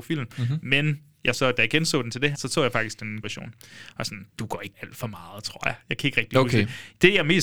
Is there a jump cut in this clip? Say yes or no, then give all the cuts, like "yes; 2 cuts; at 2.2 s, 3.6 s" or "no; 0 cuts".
yes; 5 cuts; at 1.3 s, 2.3 s, 3.2 s, 4.3 s, 4.7 s